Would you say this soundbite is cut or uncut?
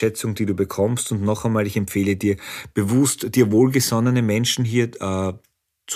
uncut